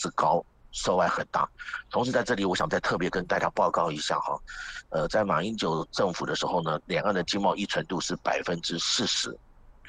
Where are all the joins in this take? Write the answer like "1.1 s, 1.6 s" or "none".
none

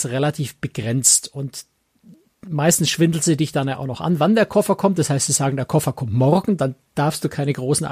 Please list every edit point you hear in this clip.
none

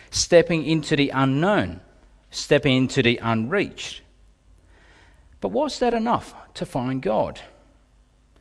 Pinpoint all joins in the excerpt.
none

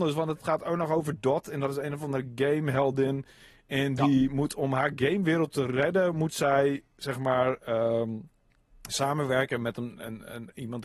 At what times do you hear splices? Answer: none

